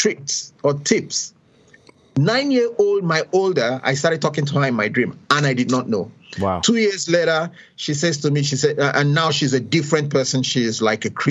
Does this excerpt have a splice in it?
no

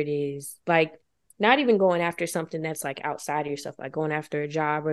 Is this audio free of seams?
yes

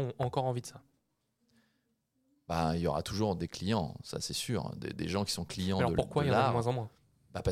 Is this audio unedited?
yes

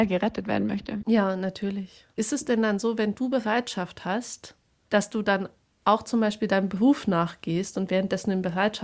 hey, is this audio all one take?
yes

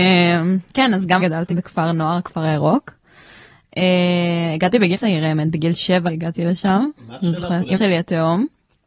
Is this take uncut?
no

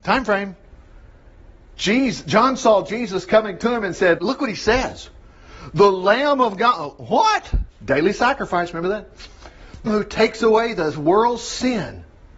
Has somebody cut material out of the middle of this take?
yes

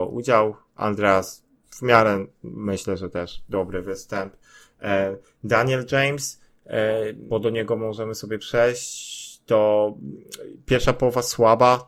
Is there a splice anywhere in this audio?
yes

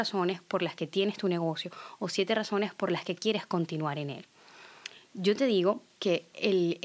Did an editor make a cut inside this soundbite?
no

